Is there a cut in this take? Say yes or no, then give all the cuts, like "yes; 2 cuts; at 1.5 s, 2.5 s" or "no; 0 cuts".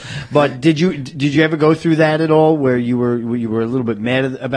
no; 0 cuts